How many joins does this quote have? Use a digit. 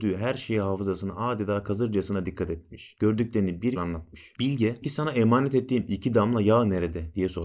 2